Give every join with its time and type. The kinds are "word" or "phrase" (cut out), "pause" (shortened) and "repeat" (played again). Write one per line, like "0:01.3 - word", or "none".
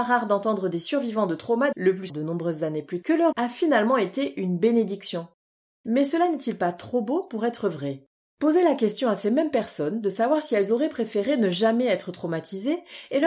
0:01.7 - word
0:02.1 - word
0:03.0 - word
0:03.3 - word